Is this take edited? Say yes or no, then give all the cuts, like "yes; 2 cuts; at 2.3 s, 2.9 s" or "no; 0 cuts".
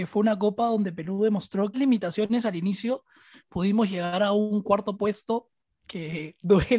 yes; 1 cut; at 1.7 s